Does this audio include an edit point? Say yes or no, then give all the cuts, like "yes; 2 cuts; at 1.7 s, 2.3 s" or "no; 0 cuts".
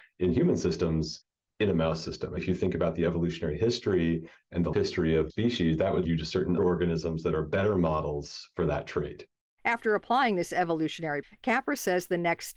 yes; 6 cuts; at 2.4 s, 4.7 s, 5.3 s, 6.1 s, 6.6 s, 11.2 s